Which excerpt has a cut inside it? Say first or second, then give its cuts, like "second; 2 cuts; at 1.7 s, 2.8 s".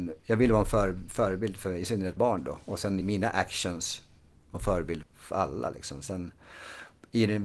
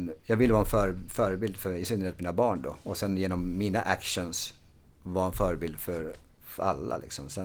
first; 4 cuts; at 2.2 s, 3.0 s, 4.5 s, 5.0 s